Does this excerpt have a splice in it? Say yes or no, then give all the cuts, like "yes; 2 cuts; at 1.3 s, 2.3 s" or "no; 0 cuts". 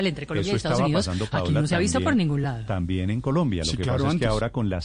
no; 0 cuts